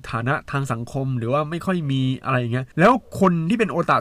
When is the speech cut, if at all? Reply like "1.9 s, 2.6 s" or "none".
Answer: 2.7 s